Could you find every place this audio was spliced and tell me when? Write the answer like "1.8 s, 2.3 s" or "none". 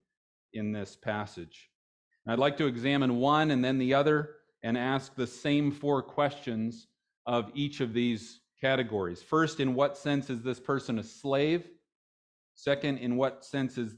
none